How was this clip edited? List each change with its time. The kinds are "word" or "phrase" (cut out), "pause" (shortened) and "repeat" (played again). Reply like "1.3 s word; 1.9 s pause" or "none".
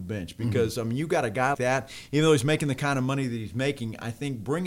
1.5 s word